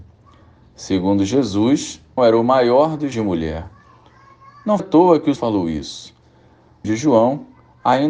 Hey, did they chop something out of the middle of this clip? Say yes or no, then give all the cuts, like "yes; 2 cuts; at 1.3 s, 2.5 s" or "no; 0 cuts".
yes; 5 cuts; at 2.2 s, 3.1 s, 4.8 s, 5.4 s, 6.8 s